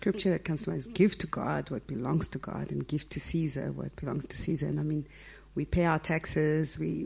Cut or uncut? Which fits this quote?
uncut